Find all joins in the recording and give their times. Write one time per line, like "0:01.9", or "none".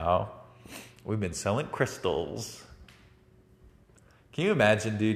none